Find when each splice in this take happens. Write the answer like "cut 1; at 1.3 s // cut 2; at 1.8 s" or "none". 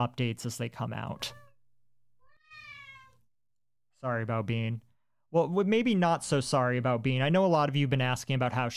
none